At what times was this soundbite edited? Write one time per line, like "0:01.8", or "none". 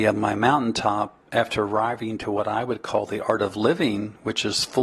none